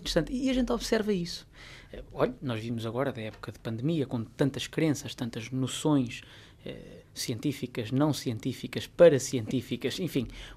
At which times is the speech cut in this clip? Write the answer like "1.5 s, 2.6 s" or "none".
7.0 s